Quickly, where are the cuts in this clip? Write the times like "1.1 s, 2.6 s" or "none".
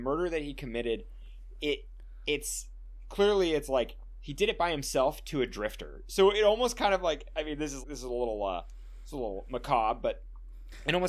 7.8 s

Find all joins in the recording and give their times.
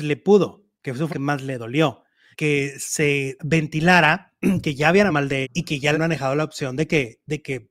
1.1 s, 2.3 s, 3.4 s, 5.1 s, 5.4 s, 5.9 s

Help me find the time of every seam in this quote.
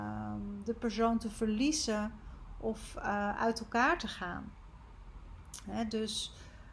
none

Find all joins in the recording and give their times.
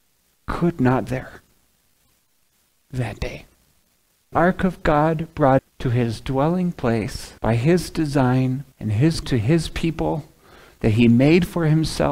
1.1 s, 4.3 s, 5.6 s, 7.4 s, 8.7 s, 9.2 s

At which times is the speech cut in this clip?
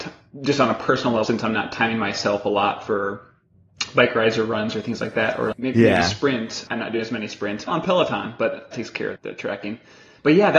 1.2 s, 5.5 s, 6.7 s, 7.7 s, 8.7 s, 9.2 s

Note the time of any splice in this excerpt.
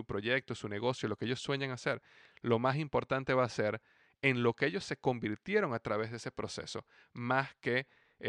none

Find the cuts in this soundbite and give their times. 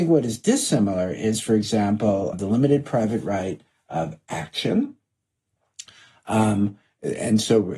2.3 s

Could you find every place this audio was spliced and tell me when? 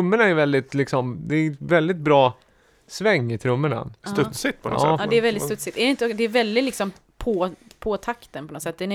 none

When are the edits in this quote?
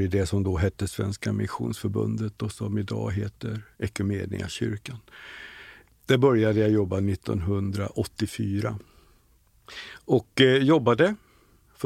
none

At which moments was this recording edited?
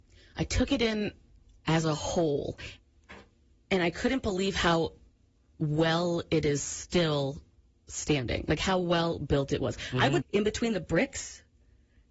10.2 s

